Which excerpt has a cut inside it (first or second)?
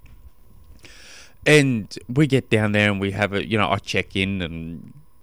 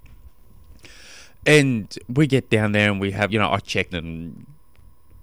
second